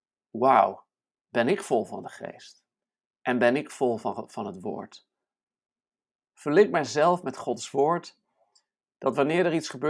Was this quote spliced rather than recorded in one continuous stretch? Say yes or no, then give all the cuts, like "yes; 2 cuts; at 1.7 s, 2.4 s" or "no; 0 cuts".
no; 0 cuts